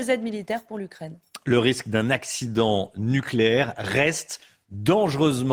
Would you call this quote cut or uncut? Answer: uncut